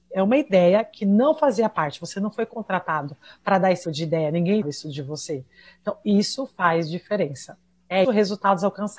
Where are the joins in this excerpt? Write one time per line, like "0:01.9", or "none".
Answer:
0:03.8
0:04.6
0:08.0